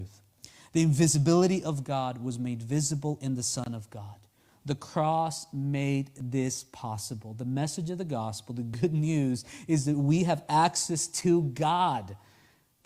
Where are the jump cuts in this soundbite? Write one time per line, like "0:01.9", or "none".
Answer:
none

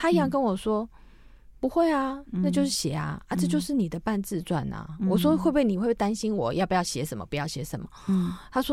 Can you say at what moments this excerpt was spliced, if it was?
0:01.6

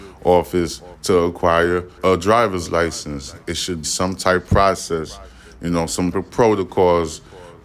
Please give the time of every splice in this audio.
0:02.0
0:03.8
0:04.5
0:06.1

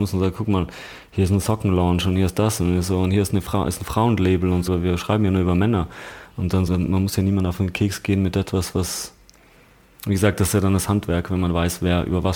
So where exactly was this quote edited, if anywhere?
0:04.7
0:06.7

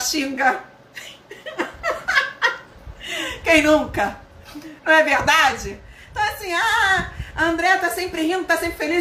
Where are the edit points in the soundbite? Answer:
0:04.8

